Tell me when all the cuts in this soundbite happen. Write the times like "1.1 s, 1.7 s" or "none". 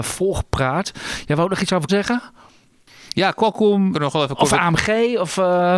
1.9 s, 3.9 s